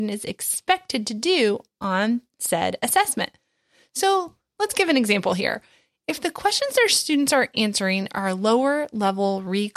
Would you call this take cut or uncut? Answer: uncut